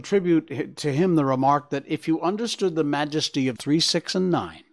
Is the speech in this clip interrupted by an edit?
yes; 1 cut; at 3.6 s

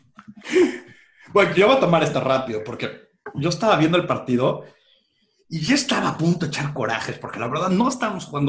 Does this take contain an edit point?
no; 0 cuts

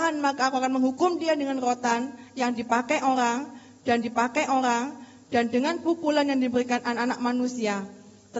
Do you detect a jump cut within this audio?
yes; 1 cut; at 4.0 s

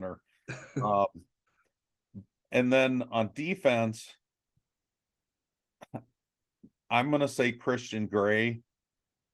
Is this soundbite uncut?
yes; 0 cuts

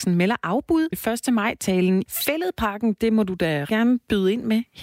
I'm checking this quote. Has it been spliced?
yes; 3 cuts; at 0.9 s, 2.1 s, 3.7 s

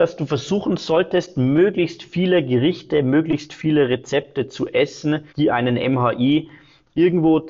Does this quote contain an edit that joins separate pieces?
yes; 1 cut; at 5.3 s

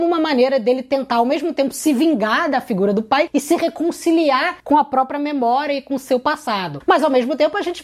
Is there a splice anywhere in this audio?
no; 0 cuts

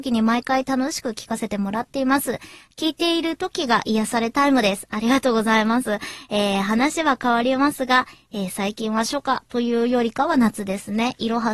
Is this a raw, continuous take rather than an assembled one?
yes; 0 cuts

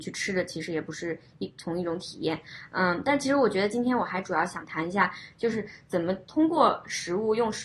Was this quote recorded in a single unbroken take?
yes; 0 cuts

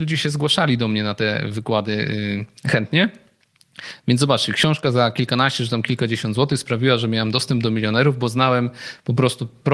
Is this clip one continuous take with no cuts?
yes; 0 cuts

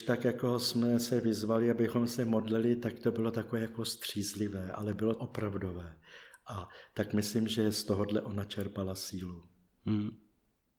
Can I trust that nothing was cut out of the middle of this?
no; 1 cut; at 5.1 s

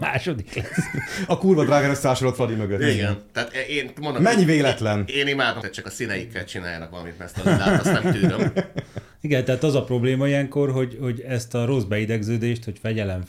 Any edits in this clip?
yes; 4 cuts; at 1.3 s, 5.1 s, 5.6 s, 9.1 s

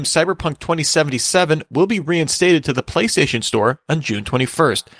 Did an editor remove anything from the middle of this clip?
no; 0 cuts

